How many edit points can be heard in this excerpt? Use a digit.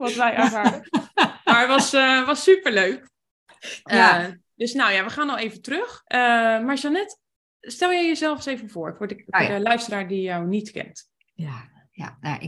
1